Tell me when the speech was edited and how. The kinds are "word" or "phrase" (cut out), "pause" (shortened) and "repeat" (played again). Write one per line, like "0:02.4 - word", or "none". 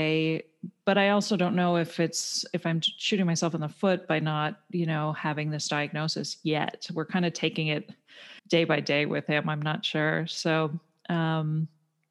0:08.4 - pause